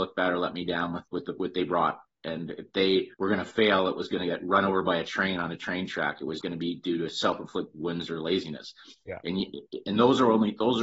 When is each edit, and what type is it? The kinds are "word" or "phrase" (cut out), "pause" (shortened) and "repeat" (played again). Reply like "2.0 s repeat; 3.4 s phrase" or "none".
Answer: 3.1 s pause; 6.4 s word